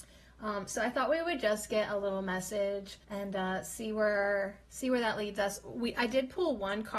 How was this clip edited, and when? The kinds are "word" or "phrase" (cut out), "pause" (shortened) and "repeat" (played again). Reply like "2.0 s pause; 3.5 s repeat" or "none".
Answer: 3.0 s pause; 4.6 s pause